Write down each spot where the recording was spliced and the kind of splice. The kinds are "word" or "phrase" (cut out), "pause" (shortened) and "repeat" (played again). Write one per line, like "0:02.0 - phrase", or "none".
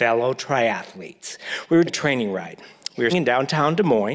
0:01.9 - word
0:03.1 - word